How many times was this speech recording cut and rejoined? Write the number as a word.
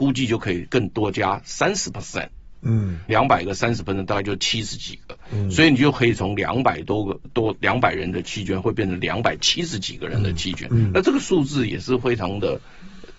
one